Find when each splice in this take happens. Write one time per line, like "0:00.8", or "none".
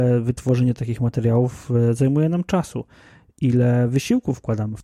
none